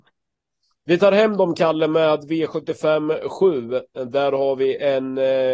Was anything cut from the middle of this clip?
no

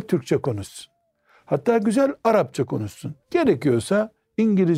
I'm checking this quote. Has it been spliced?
yes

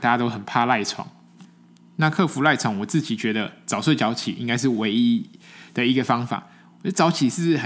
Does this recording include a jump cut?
no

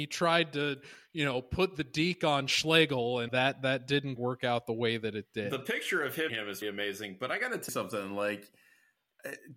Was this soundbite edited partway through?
yes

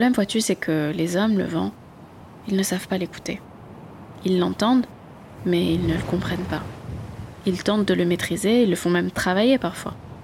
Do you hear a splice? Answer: no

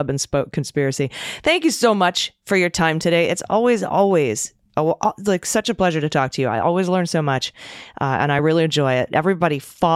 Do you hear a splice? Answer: no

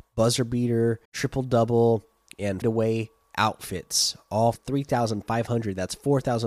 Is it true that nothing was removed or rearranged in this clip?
no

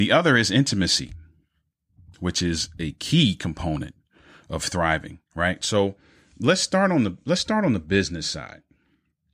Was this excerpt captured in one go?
yes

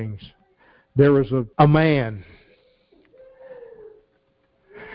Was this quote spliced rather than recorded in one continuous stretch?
yes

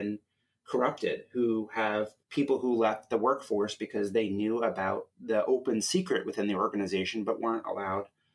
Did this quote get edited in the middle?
yes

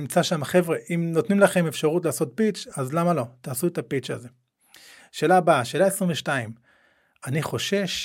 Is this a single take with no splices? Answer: yes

